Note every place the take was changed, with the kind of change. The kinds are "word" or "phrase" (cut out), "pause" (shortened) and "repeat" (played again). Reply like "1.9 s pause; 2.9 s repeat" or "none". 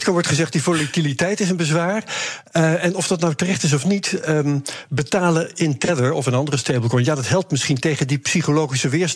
none